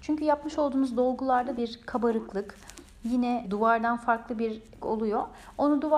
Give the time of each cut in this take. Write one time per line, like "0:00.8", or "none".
0:01.6
0:03.4
0:04.8